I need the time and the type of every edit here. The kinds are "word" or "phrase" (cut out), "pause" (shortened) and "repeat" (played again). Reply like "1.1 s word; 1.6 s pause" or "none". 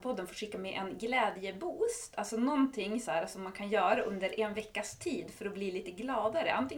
none